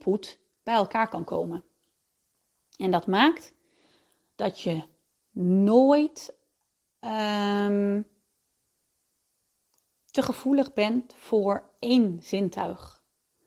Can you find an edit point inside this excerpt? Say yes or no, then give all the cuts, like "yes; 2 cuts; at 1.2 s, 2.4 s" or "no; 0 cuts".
no; 0 cuts